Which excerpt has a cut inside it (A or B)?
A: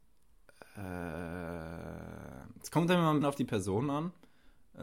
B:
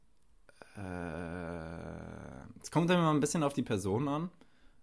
A